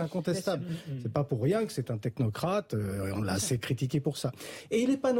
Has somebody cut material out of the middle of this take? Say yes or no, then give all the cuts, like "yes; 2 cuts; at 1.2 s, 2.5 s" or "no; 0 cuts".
no; 0 cuts